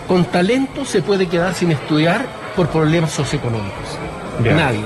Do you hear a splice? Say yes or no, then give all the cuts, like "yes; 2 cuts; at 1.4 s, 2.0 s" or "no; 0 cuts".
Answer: no; 0 cuts